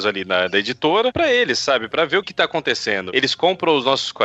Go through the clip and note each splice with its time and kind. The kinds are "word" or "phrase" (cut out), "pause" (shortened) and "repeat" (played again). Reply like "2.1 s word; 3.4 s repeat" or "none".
2.2 s word